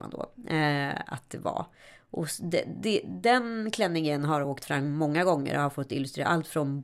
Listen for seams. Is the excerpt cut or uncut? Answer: uncut